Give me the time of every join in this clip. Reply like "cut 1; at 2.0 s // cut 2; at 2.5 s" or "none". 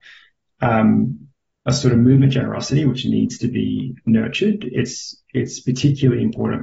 none